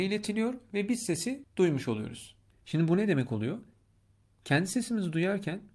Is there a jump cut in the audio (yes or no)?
no